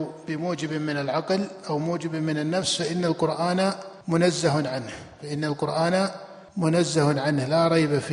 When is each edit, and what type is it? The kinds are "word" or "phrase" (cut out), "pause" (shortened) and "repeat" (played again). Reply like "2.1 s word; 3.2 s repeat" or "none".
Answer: 4.0 s pause; 6.5 s pause